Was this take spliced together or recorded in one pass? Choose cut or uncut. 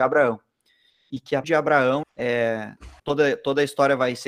cut